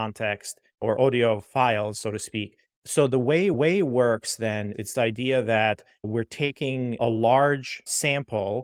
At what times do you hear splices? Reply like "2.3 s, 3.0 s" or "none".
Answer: 3.5 s, 4.9 s, 7.0 s